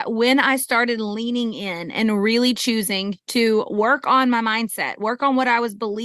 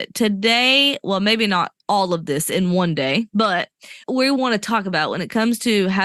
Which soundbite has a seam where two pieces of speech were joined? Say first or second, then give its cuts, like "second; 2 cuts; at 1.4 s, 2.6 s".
second; 2 cuts; at 1.8 s, 4.0 s